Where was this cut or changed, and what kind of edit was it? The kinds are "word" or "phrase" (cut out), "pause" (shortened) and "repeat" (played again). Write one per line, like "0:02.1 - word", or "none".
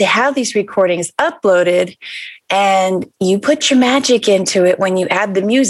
none